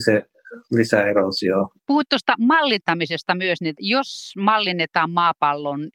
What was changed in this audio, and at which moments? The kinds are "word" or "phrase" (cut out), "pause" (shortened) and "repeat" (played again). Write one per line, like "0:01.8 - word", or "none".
0:01.8 - pause

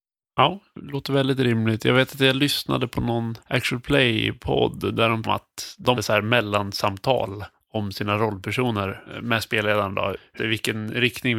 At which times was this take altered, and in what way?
0:03.4 - pause
0:05.2 - phrase
0:05.9 - word
0:10.4 - word

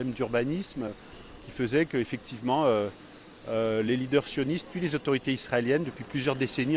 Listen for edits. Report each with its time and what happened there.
none

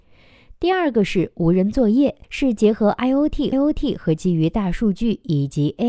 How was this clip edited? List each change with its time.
0:02.2 - pause
0:03.5 - repeat

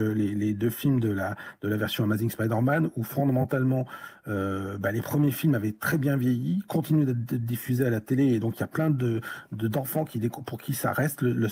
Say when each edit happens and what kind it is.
none

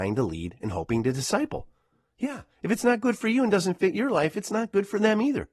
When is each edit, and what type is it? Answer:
none

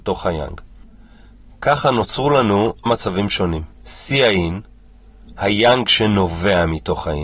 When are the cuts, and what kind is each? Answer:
0:02.9 - word
0:03.7 - pause

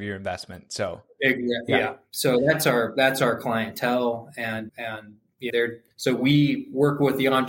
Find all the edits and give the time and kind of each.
0:04.7 - word
0:05.5 - word
0:05.9 - pause

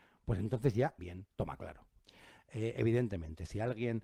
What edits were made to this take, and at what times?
0:01.0 - word

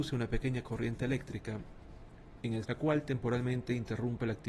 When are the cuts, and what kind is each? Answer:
0:02.6 - word

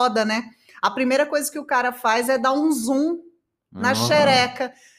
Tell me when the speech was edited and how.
none

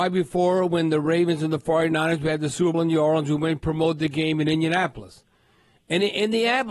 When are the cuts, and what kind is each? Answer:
0:02.7 - word

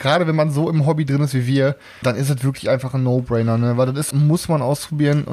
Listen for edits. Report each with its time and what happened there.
0:02.0 - word
0:04.1 - phrase

